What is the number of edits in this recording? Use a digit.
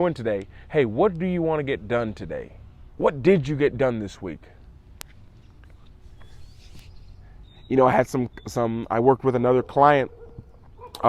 1